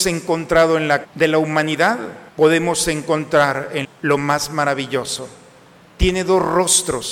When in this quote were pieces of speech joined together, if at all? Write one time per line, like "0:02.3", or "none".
0:01.0
0:02.3
0:03.8

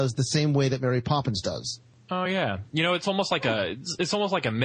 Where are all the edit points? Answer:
none

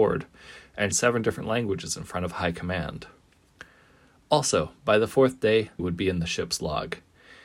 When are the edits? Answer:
0:00.9
0:05.8

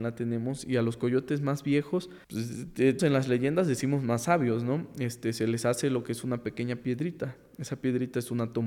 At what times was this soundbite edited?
0:02.2
0:03.0

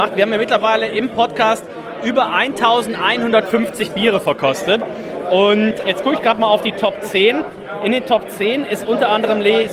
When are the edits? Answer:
0:05.8

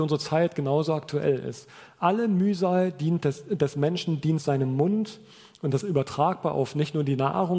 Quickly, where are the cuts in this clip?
0:05.8

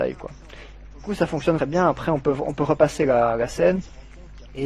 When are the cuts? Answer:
0:01.6

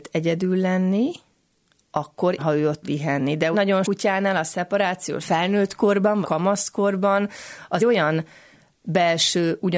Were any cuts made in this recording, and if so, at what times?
0:02.4
0:02.8
0:03.5
0:03.8
0:05.2
0:06.2
0:07.8

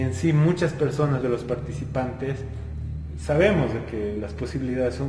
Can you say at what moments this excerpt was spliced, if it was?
0:01.2

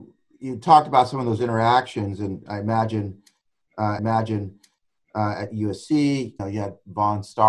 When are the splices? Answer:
0:04.0
0:06.4

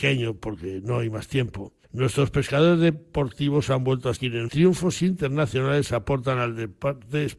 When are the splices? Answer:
0:01.8
0:04.2
0:04.5

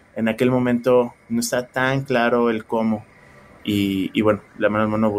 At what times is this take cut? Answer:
none

